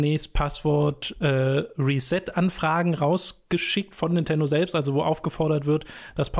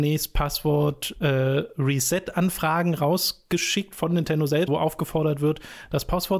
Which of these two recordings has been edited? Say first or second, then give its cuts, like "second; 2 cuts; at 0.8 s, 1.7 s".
second; 1 cut; at 4.7 s